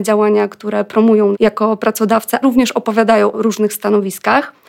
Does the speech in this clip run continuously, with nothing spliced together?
no; 3 cuts; at 1.3 s, 2.4 s, 3.3 s

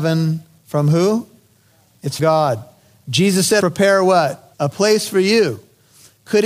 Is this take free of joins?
no; 3 cuts; at 2.2 s, 3.6 s, 4.5 s

